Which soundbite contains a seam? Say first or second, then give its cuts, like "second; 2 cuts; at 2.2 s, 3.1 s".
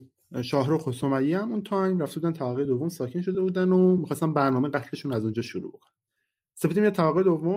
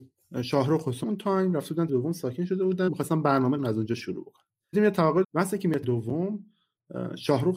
second; 7 cuts; at 1.0 s, 1.9 s, 2.9 s, 3.6 s, 4.7 s, 5.2 s, 5.8 s